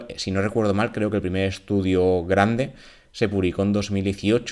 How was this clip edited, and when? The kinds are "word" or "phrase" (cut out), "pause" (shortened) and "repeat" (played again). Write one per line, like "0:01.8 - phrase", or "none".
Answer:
none